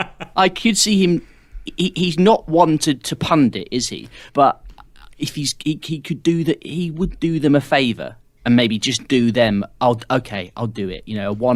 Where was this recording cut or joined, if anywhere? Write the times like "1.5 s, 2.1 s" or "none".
4.3 s

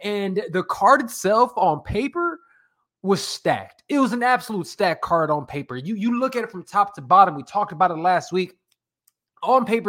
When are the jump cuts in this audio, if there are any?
none

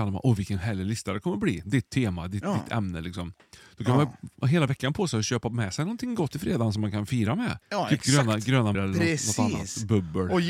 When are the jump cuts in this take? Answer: 6.3 s, 7.6 s, 8.7 s

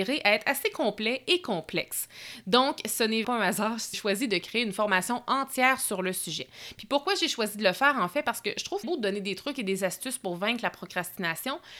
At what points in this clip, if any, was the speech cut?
3.2 s, 3.9 s, 8.8 s

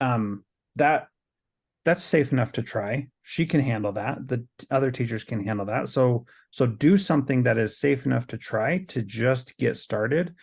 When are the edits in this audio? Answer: none

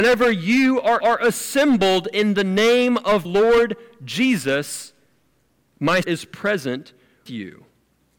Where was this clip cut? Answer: 1.0 s, 3.2 s, 6.0 s, 7.3 s

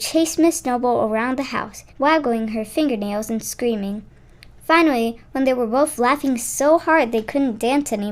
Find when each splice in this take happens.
1.9 s

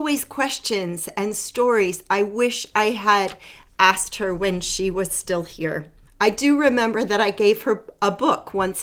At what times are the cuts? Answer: none

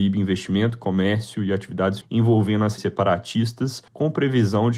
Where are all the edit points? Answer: 2.0 s, 2.8 s, 3.9 s

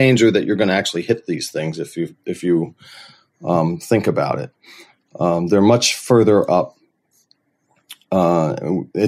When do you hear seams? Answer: none

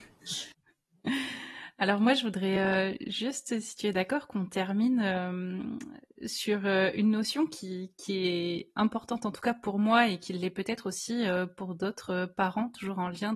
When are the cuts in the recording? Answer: none

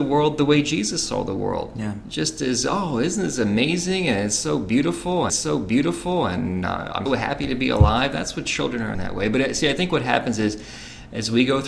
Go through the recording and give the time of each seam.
5.3 s, 7.1 s, 8.9 s

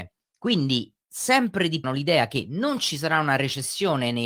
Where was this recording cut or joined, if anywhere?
1.8 s

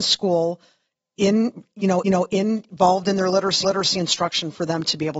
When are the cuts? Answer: 2.0 s, 3.6 s

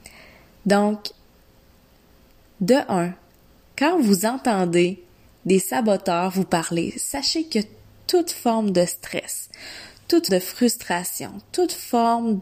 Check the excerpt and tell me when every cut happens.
10.3 s

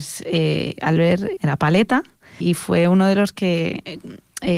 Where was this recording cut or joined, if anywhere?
1.4 s, 2.4 s

